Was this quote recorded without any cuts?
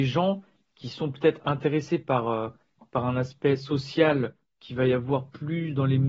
yes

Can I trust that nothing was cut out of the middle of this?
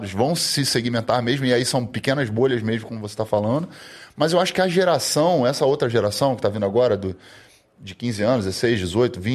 yes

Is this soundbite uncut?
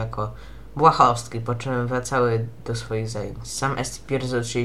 yes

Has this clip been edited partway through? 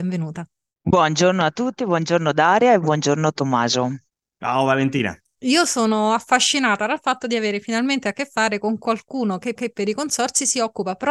yes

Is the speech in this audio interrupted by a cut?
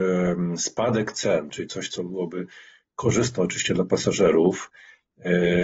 no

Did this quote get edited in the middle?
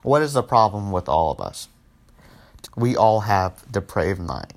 yes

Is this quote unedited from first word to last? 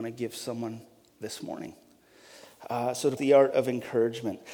no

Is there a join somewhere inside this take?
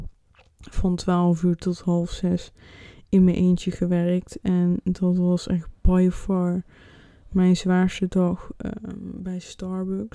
no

